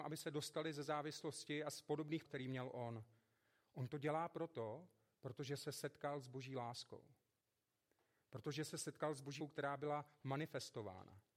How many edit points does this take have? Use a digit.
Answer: 2